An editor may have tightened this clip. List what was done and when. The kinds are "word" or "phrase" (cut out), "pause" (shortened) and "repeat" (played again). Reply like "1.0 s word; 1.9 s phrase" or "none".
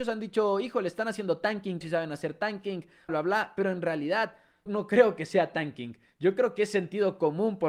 1.8 s word; 3.1 s word; 4.7 s word

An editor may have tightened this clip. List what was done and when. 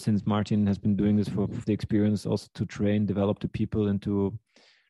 1.6 s phrase

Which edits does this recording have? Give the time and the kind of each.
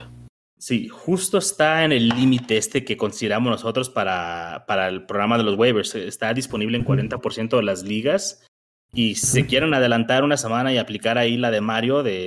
none

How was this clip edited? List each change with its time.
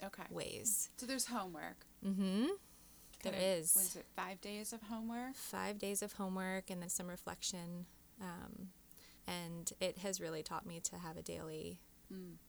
6.8 s word; 9.2 s pause

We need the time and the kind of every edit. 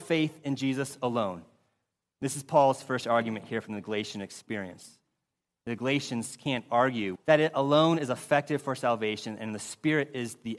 7.2 s phrase

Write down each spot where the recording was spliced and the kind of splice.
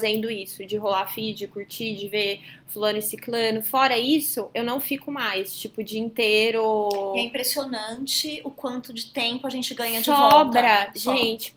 none

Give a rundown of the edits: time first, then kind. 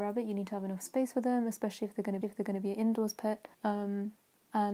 2.2 s repeat; 3.5 s pause

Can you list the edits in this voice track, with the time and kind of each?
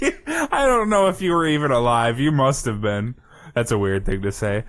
none

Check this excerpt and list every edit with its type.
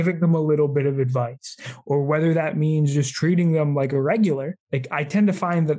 4.6 s pause

